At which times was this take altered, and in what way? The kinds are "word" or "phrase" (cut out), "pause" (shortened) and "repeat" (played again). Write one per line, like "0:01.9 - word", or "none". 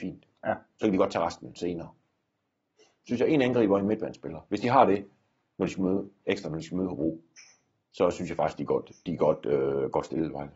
none